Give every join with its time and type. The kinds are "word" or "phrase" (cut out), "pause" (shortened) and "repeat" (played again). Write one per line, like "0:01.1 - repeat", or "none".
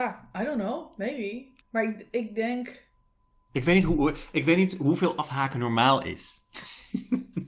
0:01.6 - pause